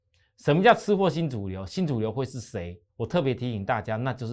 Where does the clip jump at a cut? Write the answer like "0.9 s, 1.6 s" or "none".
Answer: 2.9 s

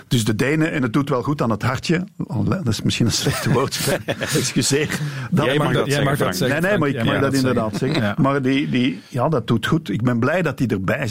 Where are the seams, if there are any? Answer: 9.0 s

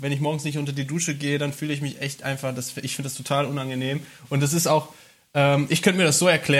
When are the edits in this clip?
none

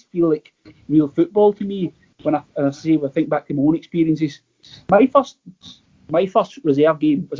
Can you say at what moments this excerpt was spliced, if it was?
none

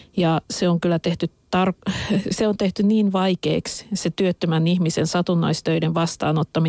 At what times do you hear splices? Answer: none

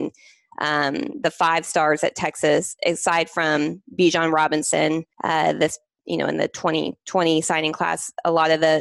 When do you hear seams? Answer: 5.1 s

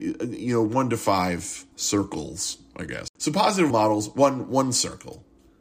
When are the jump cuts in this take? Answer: 1.7 s, 3.7 s

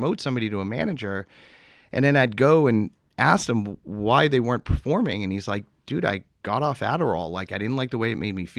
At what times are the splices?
none

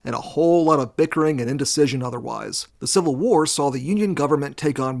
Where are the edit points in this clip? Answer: 2.7 s

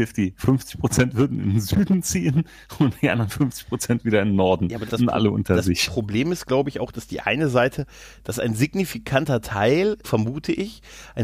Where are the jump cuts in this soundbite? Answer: 4.9 s, 10.0 s

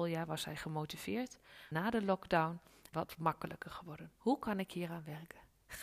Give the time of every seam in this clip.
1.7 s, 2.9 s, 4.2 s

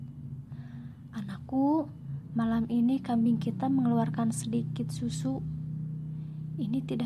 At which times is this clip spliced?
none

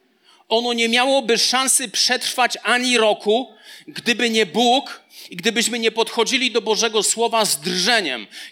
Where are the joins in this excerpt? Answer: none

